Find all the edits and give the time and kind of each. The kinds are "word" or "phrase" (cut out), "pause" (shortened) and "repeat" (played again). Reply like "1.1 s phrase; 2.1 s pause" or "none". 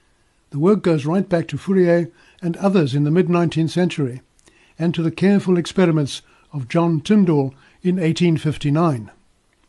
none